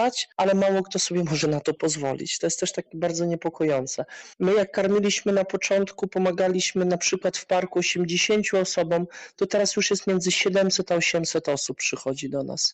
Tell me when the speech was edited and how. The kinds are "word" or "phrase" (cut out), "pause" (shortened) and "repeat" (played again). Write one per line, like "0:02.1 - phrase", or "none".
0:04.3 - pause